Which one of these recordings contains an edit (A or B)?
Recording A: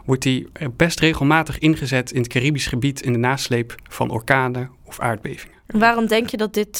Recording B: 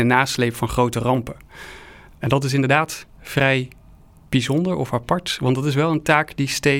A